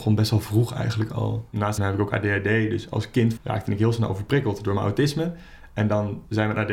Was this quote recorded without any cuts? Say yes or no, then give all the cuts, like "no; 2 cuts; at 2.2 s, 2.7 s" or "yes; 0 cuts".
no; 2 cuts; at 1.8 s, 3.4 s